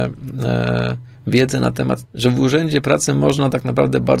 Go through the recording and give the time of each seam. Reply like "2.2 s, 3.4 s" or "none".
2.0 s